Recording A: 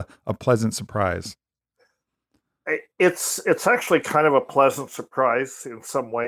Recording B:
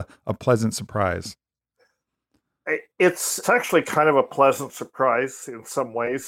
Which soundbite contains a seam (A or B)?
B